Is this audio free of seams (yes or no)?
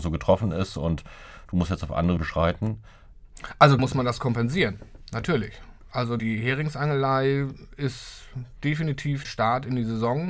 no